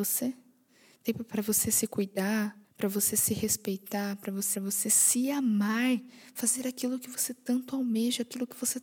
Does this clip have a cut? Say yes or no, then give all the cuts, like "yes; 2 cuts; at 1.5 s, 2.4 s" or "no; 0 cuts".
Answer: yes; 2 cuts; at 2.6 s, 4.5 s